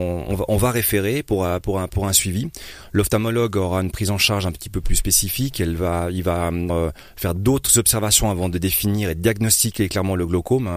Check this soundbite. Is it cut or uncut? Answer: cut